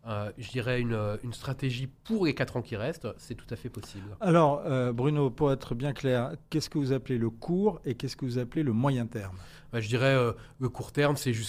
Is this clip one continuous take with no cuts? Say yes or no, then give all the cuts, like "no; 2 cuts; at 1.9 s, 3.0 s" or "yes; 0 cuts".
yes; 0 cuts